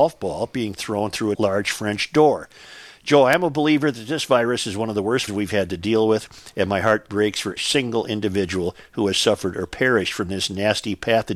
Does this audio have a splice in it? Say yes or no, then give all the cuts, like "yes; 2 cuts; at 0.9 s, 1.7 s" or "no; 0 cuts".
yes; 3 cuts; at 1.3 s, 5.3 s, 7.6 s